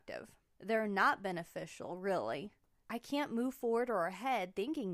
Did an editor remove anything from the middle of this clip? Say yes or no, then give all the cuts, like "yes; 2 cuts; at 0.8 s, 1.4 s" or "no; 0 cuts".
no; 0 cuts